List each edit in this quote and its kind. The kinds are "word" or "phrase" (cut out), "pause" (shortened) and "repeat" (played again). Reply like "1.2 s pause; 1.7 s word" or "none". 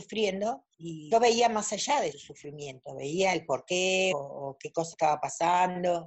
1.1 s word; 2.1 s word; 4.1 s word; 4.9 s word